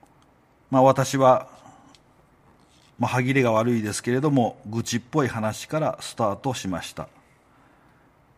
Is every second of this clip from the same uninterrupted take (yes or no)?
yes